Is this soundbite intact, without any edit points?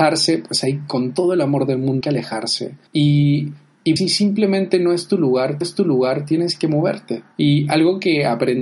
no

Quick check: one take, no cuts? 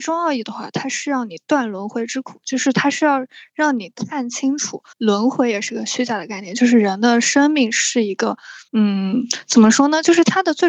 no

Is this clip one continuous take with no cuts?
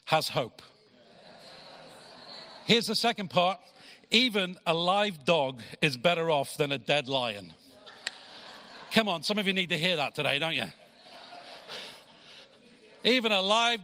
yes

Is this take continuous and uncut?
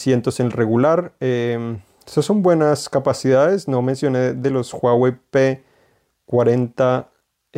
yes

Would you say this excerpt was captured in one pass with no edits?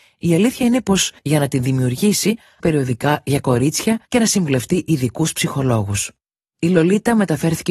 no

